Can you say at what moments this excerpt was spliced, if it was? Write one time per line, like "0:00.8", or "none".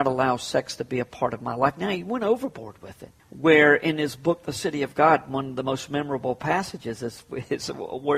0:03.2